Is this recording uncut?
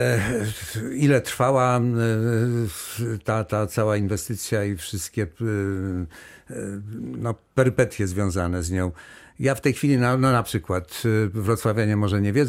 yes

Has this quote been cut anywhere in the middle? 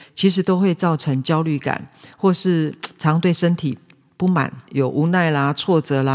yes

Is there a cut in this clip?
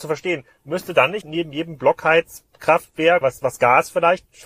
yes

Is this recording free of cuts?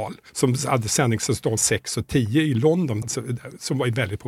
no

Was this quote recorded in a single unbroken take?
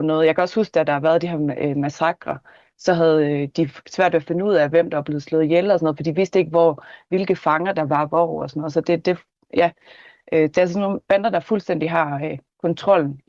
yes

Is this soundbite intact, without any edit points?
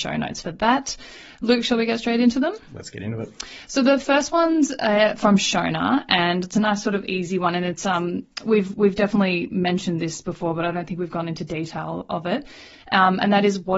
yes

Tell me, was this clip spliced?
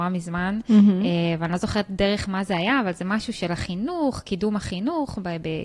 no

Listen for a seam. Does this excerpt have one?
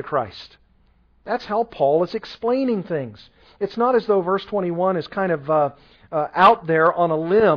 no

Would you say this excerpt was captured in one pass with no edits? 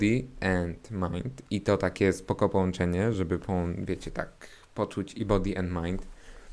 yes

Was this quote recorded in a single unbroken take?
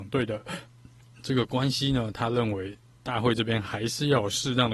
yes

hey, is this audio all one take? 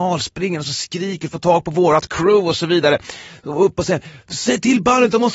yes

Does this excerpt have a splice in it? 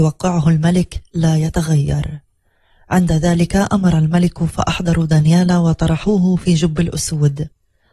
no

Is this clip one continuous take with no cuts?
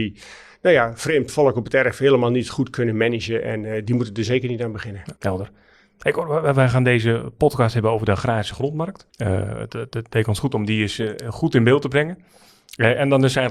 no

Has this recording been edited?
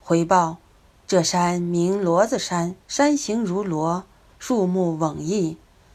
yes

